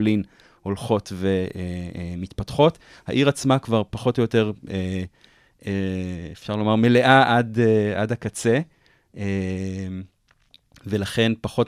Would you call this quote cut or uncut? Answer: uncut